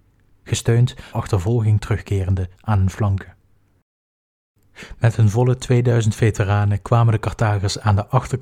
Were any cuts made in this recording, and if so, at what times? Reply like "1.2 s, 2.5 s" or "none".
1.1 s, 2.6 s